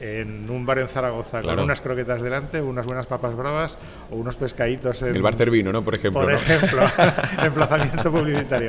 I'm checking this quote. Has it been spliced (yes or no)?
no